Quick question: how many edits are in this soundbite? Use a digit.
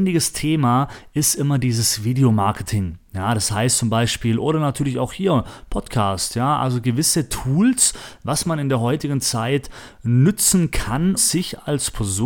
1